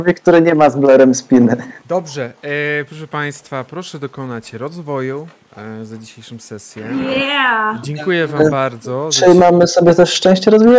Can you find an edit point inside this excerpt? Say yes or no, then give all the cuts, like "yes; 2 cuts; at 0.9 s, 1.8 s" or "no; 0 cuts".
yes; 1 cut; at 1.8 s